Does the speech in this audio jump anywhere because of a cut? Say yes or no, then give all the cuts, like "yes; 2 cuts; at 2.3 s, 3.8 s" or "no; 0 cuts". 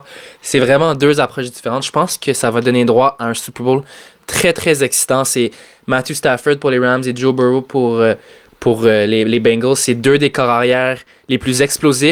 no; 0 cuts